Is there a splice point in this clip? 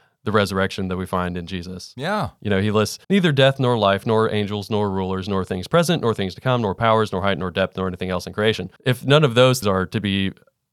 yes; 3 cuts; at 3.0 s, 8.8 s, 9.6 s

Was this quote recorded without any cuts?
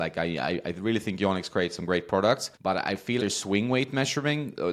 no; 2 cuts; at 2.5 s, 3.2 s

